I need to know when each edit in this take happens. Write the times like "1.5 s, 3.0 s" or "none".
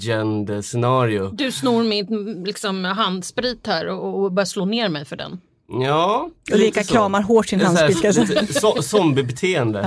none